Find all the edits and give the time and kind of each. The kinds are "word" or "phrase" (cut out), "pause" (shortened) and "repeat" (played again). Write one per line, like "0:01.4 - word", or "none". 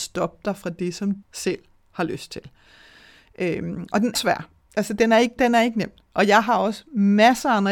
0:01.2 - word
0:04.1 - word
0:05.4 - word